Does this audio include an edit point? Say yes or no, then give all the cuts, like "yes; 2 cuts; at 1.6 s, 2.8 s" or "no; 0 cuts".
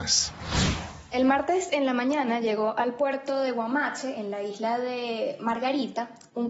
no; 0 cuts